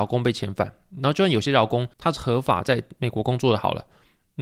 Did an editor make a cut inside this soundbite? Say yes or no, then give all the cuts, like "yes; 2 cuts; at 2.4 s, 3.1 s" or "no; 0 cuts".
yes; 1 cut; at 1.9 s